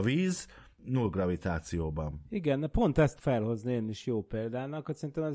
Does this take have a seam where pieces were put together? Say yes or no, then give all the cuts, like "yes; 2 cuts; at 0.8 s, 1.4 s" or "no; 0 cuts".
yes; 1 cut; at 3.2 s